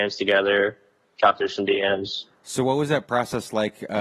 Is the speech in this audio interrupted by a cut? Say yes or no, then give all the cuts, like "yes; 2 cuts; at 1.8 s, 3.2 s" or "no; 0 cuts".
yes; 1 cut; at 2.3 s